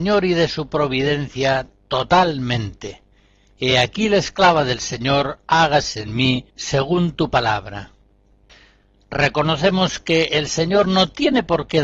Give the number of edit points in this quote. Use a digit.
0